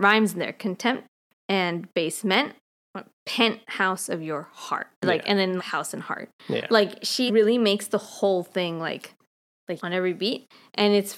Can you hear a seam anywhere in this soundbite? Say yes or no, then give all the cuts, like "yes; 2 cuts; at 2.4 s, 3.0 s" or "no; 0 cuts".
yes; 5 cuts; at 1.3 s, 4.9 s, 5.6 s, 7.3 s, 9.8 s